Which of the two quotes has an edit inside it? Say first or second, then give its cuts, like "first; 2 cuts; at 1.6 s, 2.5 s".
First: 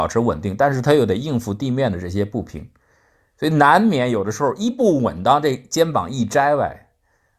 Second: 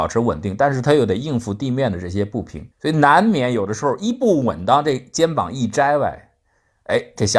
second; 1 cut; at 2.7 s